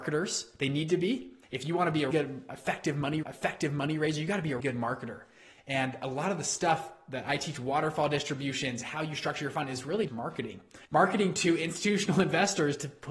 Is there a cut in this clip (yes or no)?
yes